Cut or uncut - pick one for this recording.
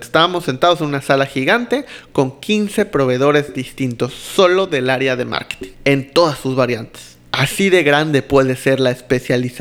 cut